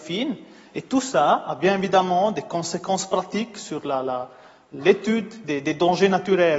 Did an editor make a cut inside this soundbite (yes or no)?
no